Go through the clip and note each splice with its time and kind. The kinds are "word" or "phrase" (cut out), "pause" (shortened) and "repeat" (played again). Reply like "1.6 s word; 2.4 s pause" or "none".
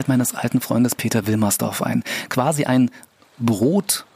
none